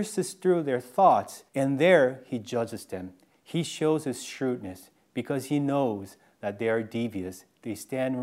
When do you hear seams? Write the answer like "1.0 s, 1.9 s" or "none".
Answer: 1.5 s